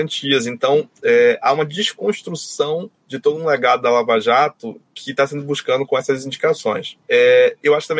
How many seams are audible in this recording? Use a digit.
2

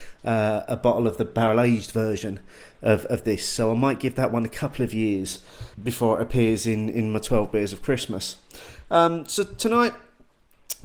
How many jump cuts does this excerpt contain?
1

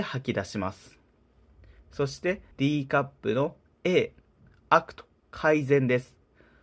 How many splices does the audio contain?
1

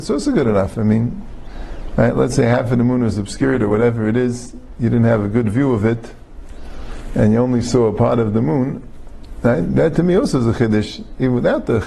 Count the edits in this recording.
0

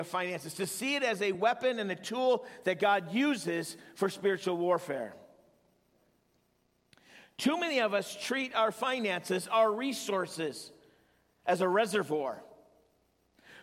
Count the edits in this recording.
0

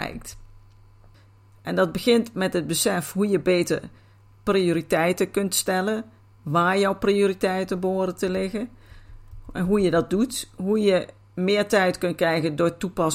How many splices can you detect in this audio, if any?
0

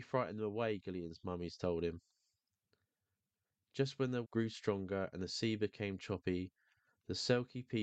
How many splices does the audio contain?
1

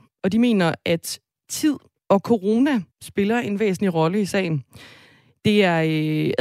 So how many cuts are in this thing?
1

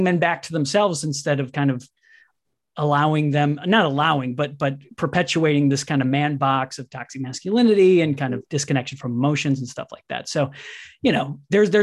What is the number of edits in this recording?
0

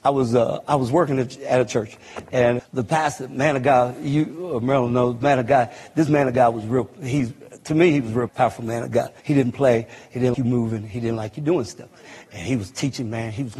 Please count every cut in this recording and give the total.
4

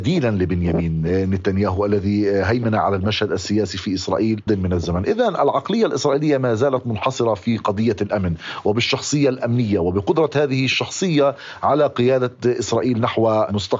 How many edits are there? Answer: 1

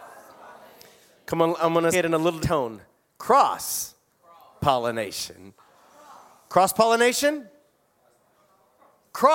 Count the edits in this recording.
2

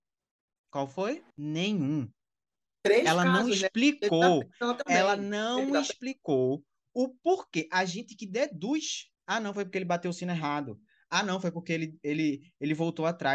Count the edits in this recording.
2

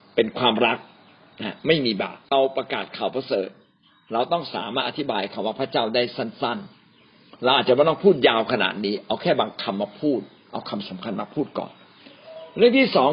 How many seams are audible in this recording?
1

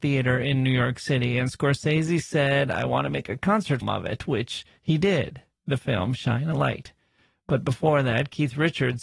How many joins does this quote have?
1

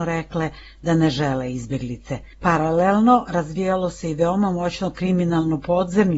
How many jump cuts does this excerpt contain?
1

